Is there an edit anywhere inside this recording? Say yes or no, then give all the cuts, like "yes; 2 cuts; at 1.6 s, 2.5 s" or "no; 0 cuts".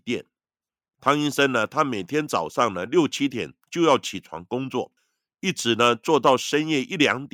no; 0 cuts